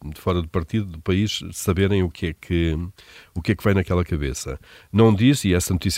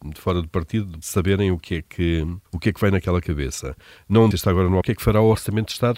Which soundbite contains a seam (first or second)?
second